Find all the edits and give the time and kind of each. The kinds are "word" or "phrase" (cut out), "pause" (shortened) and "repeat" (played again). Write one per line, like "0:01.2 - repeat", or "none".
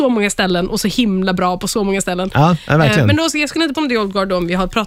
0:03.7 - word